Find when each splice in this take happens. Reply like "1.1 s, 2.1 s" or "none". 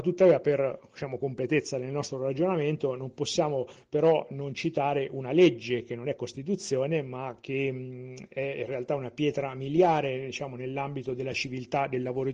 none